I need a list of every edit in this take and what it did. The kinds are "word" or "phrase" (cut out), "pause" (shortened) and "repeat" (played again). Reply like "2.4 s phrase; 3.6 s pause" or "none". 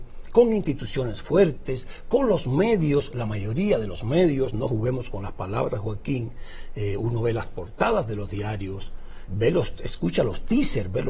9.3 s word